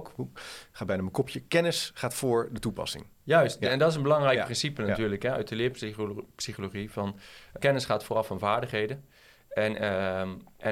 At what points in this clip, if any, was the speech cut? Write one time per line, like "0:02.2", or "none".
0:07.6

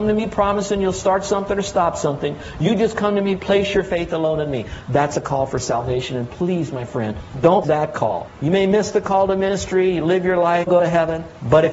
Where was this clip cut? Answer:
0:07.6
0:10.7

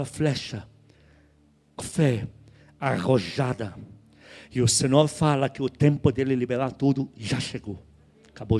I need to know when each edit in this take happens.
0:01.8

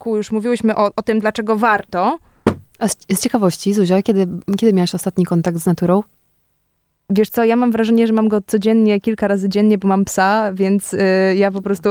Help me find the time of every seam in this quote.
none

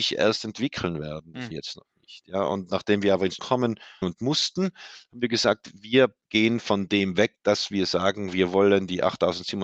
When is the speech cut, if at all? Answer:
0:01.5
0:03.4
0:04.0
0:06.2

